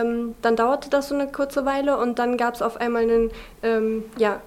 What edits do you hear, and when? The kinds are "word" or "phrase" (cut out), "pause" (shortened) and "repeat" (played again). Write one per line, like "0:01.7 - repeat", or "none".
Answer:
none